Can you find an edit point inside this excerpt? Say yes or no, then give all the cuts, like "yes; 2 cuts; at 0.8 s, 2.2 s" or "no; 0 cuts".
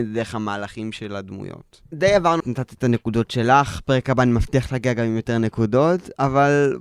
yes; 2 cuts; at 1.9 s, 2.4 s